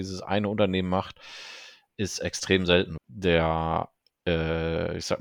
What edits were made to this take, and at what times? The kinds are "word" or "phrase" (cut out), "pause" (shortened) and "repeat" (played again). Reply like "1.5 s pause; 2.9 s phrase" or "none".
3.0 s phrase